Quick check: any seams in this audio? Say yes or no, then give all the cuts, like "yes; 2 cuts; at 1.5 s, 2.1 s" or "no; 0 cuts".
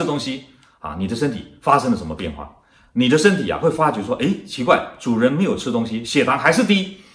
no; 0 cuts